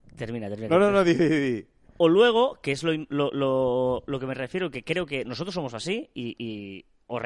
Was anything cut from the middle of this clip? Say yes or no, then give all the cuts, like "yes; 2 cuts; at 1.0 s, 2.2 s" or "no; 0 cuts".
no; 0 cuts